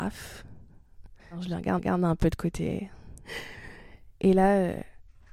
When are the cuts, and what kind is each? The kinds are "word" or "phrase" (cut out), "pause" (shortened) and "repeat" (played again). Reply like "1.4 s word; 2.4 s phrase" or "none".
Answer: 1.2 s pause; 1.8 s repeat; 4.1 s pause

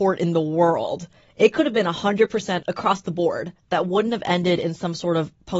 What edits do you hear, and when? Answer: 2.6 s word

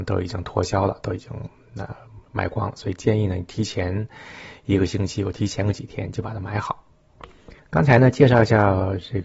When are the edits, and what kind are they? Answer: 2.3 s pause; 7.6 s pause

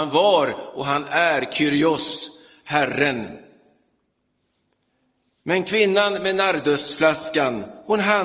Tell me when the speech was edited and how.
none

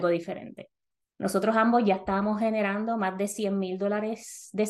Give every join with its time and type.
none

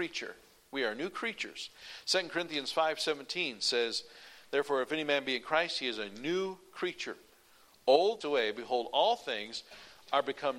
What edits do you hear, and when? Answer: 8.2 s phrase

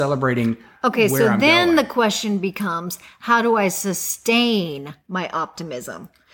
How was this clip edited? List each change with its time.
none

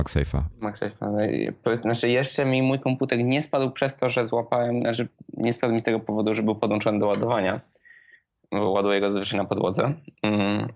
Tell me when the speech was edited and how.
none

